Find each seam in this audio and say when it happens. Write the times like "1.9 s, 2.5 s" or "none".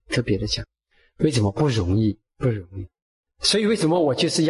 2.3 s